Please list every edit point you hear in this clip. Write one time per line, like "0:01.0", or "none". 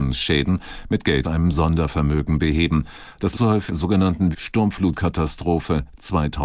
0:01.2
0:03.3
0:03.7
0:04.3